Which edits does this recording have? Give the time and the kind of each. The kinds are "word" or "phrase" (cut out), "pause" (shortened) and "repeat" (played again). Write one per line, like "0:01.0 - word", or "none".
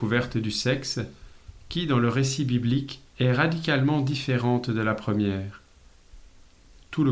0:03.1 - pause